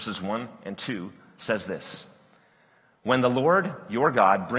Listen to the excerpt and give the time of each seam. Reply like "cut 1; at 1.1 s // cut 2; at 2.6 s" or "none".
none